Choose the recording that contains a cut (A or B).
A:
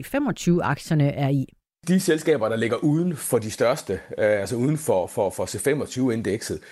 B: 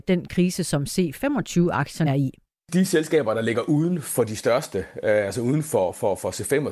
B